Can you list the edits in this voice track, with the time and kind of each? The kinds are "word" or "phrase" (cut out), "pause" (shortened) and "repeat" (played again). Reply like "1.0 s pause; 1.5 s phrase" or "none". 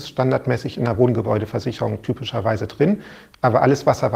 none

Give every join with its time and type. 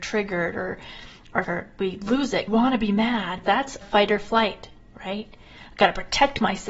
1.4 s word; 2.5 s phrase; 3.4 s word; 3.8 s word

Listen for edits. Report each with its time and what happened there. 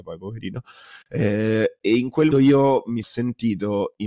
1.0 s pause; 2.3 s word; 3.0 s word

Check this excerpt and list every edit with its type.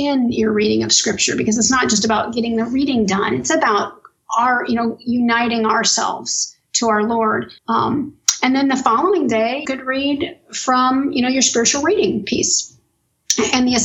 7.6 s pause; 9.6 s word

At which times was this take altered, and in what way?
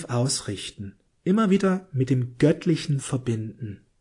none

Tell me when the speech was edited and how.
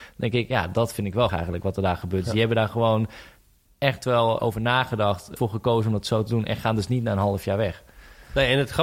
1.3 s word; 4.4 s word; 5.4 s word

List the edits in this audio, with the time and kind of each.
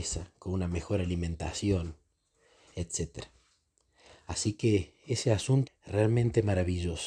5.7 s word

